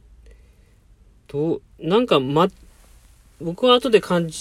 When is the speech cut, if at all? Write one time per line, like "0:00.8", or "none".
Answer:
0:01.7